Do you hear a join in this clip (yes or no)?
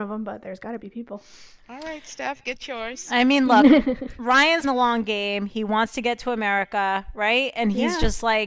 yes